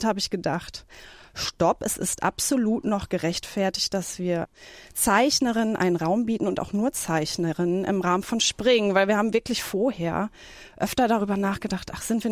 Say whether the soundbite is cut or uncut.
uncut